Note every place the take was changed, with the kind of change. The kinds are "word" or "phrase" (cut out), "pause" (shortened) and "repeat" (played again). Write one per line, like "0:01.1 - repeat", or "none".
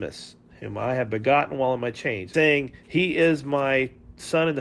0:02.3 - phrase